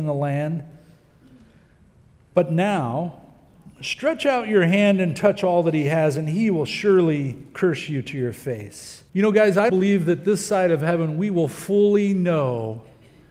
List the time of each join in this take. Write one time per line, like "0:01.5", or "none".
0:09.1
0:09.7